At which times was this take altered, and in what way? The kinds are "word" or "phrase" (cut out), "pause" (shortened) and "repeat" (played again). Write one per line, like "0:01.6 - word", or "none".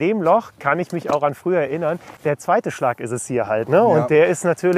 0:02.2 - pause